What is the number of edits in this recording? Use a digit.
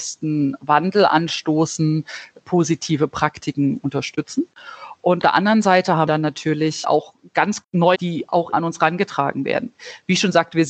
6